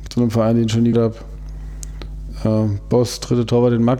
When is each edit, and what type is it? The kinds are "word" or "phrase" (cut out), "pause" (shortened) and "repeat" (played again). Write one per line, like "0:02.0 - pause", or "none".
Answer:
0:00.9 - word